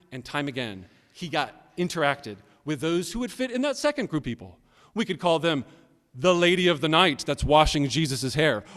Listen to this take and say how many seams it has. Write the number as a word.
one